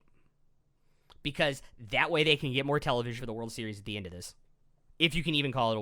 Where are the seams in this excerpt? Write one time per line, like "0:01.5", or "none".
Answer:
0:03.2